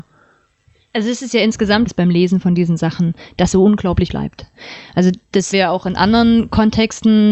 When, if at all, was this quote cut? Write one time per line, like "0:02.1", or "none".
0:01.9
0:03.5
0:04.1
0:05.5